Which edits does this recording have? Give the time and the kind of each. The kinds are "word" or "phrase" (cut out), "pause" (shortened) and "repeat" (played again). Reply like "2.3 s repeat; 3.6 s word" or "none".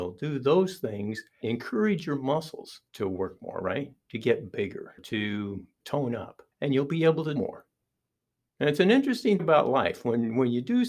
1.4 s word; 2.9 s pause; 5.0 s word; 5.8 s word; 6.5 s pause; 7.4 s word; 9.4 s word